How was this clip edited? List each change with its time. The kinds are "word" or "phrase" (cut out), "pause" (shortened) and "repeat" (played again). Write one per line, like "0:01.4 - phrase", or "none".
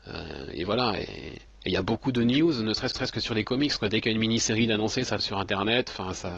0:01.5 - pause
0:02.9 - repeat
0:05.2 - word